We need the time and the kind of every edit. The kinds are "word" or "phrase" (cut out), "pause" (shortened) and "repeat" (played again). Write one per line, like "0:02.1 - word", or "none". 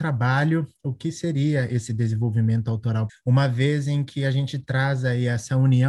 0:03.1 - word